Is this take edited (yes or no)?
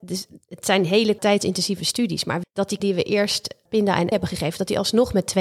yes